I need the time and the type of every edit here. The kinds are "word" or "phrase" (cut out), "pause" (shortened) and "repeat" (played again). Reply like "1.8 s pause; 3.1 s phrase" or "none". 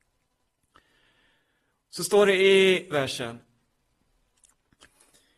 2.9 s word